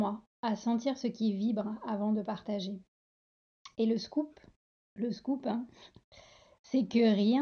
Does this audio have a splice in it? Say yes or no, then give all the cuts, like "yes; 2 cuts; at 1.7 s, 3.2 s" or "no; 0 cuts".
no; 0 cuts